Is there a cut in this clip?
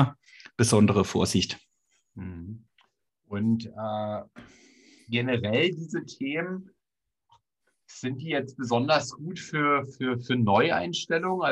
no; 0 cuts

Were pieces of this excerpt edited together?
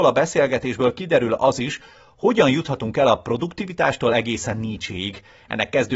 no; 0 cuts

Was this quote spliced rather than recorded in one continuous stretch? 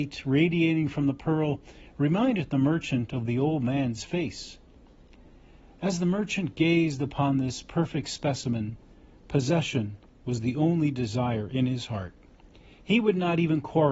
no; 0 cuts

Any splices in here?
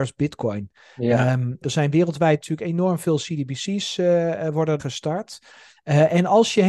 yes; 2 cuts; at 1.6 s, 4.8 s

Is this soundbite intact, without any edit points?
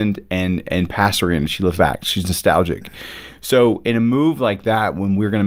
no; 1 cut; at 1.8 s

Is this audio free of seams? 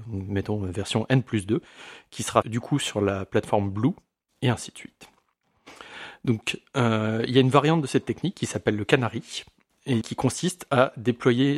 no; 2 cuts; at 2.4 s, 10.0 s

